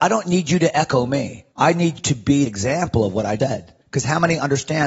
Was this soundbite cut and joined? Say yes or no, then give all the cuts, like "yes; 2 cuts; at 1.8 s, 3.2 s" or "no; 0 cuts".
yes; 5 cuts; at 1.5 s, 2.0 s, 2.5 s, 3.4 s, 3.8 s